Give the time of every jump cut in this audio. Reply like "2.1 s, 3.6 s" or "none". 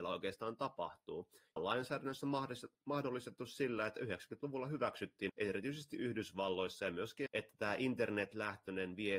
1.6 s, 5.3 s, 7.3 s